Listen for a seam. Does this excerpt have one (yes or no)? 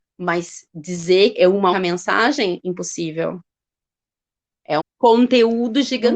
yes